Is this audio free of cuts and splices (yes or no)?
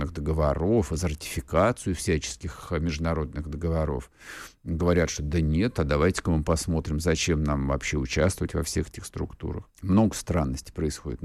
no